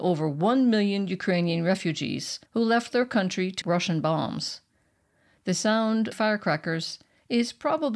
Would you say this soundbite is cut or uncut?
cut